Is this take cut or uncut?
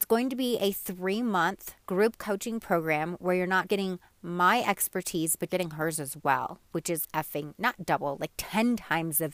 cut